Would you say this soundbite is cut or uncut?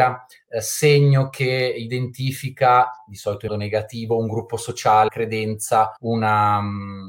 cut